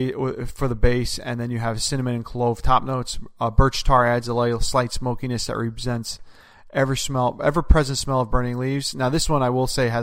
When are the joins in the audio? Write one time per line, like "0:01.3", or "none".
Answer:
none